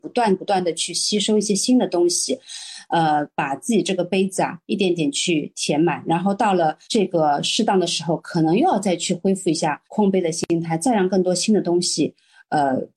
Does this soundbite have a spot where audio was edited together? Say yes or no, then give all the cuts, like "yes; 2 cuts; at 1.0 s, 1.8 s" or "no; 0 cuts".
yes; 2 cuts; at 6.8 s, 9.8 s